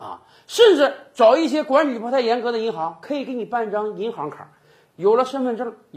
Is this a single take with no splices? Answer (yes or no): yes